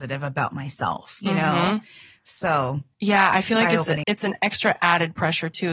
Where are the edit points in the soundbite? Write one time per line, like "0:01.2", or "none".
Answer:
0:02.9
0:04.0